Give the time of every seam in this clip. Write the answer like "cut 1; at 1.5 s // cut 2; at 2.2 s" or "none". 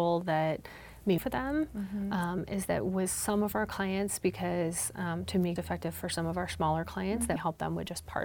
cut 1; at 1.2 s // cut 2; at 5.6 s // cut 3; at 7.4 s